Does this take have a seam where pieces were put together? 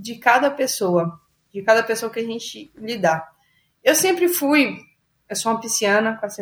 no; 0 cuts

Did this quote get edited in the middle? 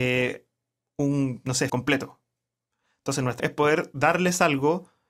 yes; 2 cuts; at 1.7 s, 3.4 s

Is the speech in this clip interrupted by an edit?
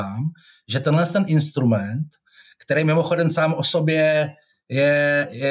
no; 0 cuts

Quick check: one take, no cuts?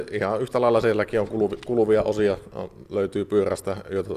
yes; 0 cuts

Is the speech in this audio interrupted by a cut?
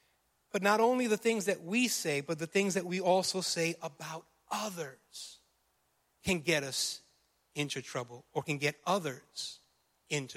no; 0 cuts

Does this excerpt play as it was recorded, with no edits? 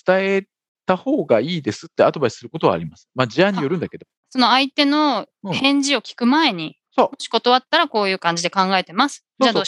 no; 3 cuts; at 4.2 s, 5.3 s, 6.8 s

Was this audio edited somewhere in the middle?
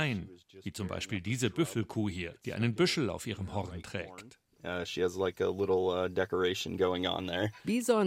no; 0 cuts

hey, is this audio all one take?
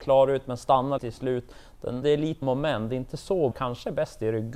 no; 4 cuts; at 1.0 s, 2.0 s, 2.4 s, 3.5 s

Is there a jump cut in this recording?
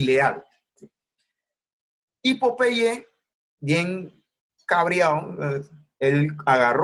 no; 0 cuts

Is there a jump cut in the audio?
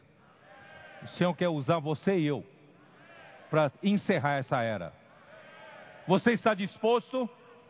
no; 0 cuts

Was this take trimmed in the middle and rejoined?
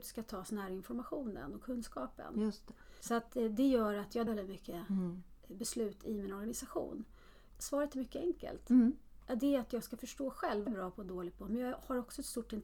yes; 4 cuts; at 3.0 s, 4.3 s, 7.6 s, 10.7 s

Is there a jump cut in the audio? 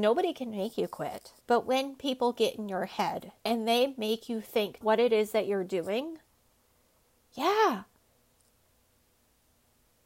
yes; 3 cuts; at 1.4 s, 3.4 s, 4.8 s

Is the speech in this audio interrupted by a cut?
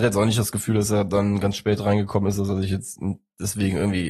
no; 0 cuts

